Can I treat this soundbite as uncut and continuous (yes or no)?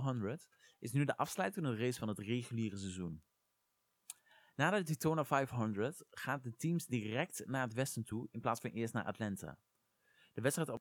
yes